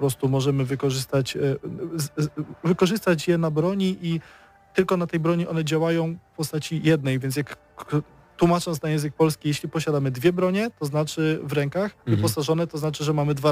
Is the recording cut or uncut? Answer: uncut